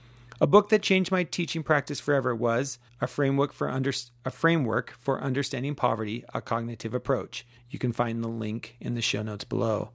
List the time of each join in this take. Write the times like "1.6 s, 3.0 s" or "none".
2.9 s, 7.6 s